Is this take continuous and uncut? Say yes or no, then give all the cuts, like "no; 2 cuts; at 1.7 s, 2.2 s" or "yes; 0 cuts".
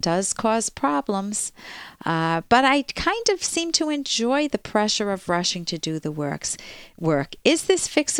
yes; 0 cuts